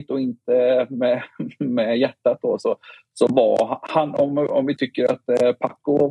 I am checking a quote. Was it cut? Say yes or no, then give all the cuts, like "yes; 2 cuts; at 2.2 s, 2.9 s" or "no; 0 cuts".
no; 0 cuts